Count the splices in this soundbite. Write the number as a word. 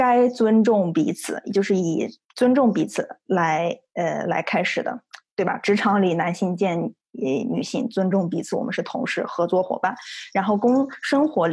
one